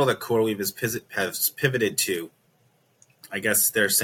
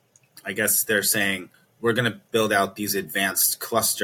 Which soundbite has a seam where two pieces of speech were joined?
second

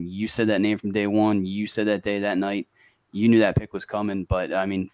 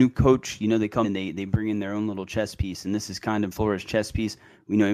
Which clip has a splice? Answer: second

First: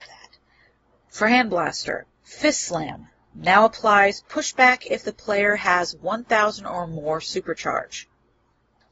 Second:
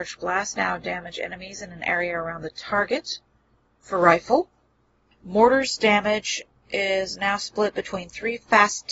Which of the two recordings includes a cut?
first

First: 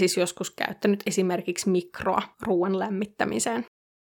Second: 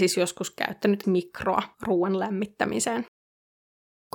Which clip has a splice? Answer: second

